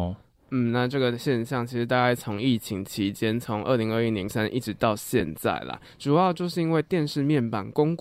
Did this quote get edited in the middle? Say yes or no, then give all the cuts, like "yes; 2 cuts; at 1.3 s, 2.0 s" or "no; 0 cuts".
yes; 1 cut; at 4.3 s